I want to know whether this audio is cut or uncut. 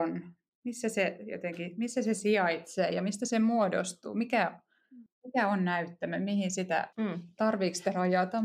cut